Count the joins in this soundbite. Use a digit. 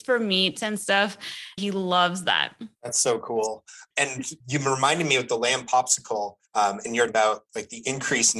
6